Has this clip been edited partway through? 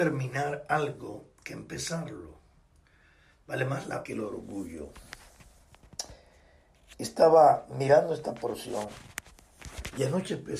yes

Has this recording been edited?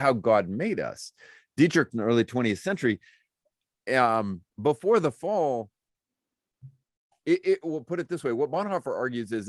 yes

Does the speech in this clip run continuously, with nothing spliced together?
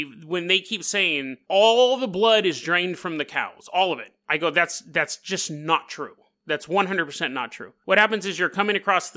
yes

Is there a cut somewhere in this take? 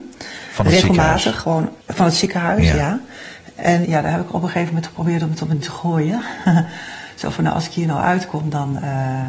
yes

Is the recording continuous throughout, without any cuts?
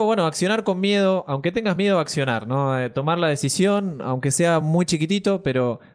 yes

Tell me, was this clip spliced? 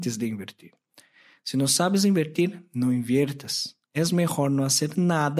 yes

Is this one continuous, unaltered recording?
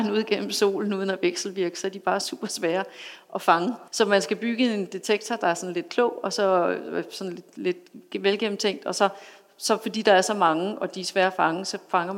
no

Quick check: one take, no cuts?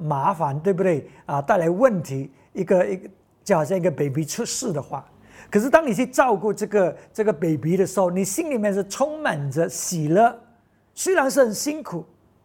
yes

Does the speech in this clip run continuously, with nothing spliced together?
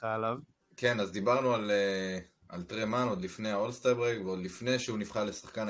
yes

